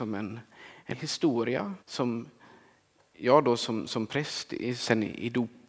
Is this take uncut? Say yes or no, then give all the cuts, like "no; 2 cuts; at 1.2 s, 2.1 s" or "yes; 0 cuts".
no; 2 cuts; at 0.9 s, 1.8 s